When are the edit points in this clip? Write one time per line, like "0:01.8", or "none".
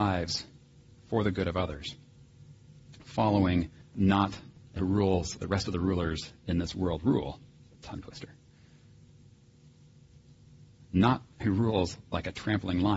0:04.8
0:05.4
0:07.6
0:11.4